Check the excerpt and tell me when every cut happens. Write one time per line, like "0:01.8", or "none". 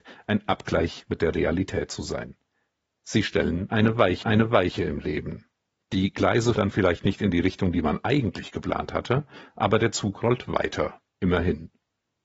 0:04.2
0:06.5
0:11.1